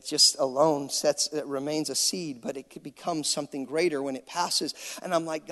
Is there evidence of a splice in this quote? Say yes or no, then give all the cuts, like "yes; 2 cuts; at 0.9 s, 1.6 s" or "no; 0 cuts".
no; 0 cuts